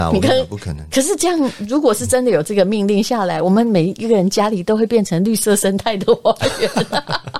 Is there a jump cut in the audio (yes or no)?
no